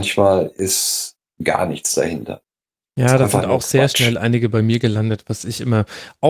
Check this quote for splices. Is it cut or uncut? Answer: uncut